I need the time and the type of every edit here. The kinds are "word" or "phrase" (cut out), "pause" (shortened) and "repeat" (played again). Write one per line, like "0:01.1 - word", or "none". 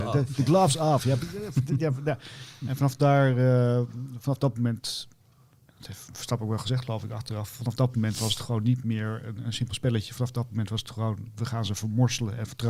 none